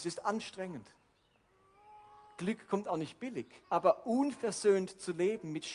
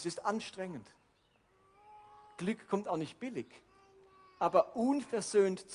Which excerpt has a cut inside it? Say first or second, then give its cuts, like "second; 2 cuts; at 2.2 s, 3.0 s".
first; 1 cut; at 3.6 s